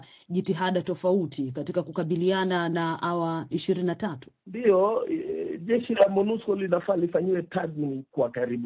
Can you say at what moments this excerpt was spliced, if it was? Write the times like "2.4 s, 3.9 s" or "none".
3.5 s, 4.4 s